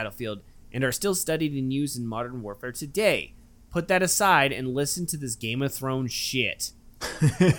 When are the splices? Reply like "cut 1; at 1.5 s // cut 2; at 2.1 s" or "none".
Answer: none